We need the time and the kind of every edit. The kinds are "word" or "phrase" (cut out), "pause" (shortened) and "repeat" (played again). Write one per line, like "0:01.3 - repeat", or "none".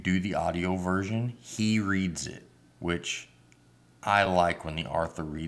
none